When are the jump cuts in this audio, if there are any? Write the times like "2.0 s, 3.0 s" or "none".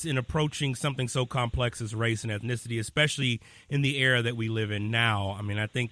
none